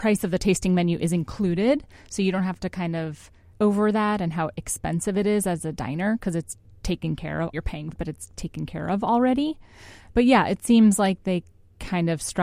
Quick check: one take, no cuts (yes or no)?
no